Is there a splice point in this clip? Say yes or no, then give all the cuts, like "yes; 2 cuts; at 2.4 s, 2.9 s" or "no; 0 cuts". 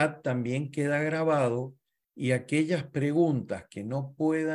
no; 0 cuts